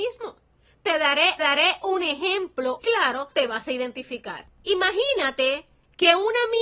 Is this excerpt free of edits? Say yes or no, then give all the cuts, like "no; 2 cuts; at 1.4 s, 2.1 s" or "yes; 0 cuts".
no; 3 cuts; at 1.4 s, 2.8 s, 3.3 s